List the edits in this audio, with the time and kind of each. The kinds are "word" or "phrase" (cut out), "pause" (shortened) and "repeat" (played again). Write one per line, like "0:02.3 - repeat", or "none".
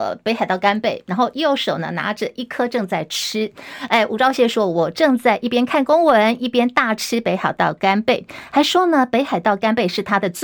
none